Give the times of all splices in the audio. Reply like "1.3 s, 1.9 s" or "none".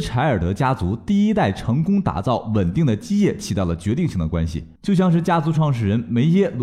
4.8 s